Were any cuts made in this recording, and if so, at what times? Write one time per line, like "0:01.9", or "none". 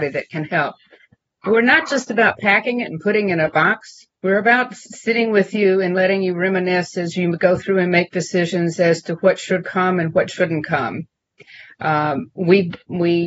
0:04.1